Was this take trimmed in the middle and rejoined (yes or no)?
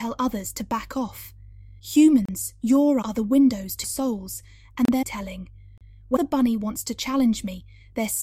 yes